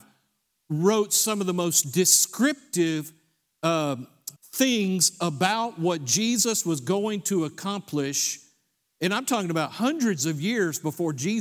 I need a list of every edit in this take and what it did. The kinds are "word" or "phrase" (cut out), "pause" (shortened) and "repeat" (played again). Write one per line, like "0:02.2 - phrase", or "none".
0:04.4 - pause